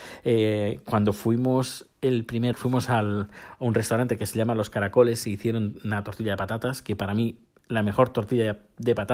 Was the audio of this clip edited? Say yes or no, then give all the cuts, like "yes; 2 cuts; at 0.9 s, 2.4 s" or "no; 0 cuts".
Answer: yes; 1 cut; at 2.5 s